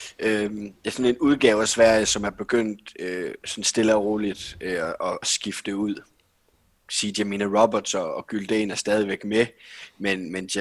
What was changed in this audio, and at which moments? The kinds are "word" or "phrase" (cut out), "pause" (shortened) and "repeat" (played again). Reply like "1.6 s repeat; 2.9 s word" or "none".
5.2 s word